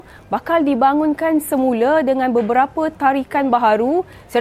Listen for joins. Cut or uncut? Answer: uncut